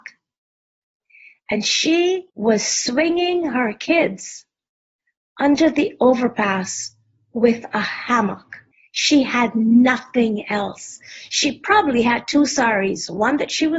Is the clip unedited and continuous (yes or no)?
no